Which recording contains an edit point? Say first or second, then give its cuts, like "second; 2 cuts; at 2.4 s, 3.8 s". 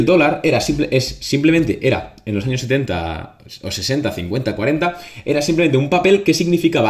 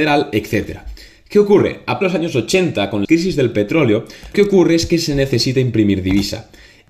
second; 3 cuts; at 2.0 s, 3.0 s, 4.3 s